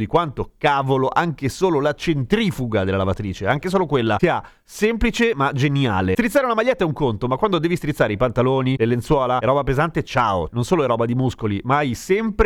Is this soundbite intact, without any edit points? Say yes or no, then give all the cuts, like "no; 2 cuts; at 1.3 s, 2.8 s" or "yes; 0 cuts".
no; 1 cut; at 10.5 s